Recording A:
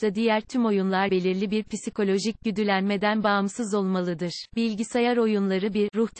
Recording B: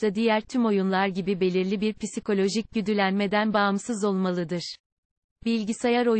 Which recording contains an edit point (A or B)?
A